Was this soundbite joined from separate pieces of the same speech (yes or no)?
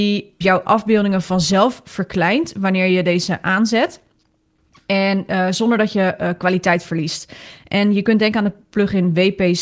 no